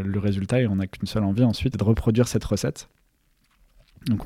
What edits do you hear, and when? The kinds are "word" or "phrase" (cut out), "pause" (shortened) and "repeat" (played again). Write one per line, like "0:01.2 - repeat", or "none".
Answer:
0:01.7 - word